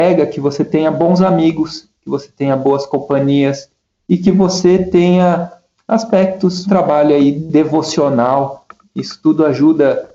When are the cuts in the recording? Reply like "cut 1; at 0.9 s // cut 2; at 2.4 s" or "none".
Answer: cut 1; at 6.7 s